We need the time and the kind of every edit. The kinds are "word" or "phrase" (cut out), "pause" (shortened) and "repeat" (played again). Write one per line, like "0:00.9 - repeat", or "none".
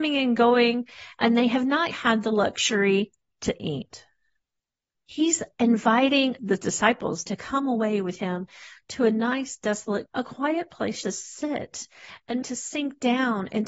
0:01.9 - word
0:03.6 - word
0:10.1 - word
0:11.0 - word
0:12.4 - word